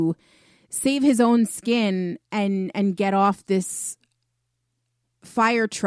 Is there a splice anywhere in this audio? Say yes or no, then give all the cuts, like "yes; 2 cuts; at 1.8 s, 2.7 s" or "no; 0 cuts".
no; 0 cuts